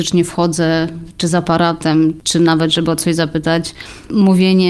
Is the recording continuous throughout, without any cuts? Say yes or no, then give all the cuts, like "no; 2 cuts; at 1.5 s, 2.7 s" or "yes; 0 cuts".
yes; 0 cuts